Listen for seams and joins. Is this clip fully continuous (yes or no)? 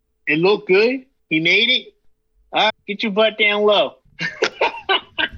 no